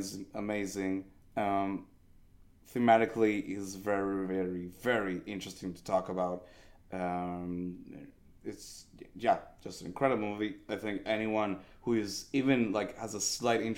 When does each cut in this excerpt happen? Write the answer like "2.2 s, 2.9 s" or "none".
none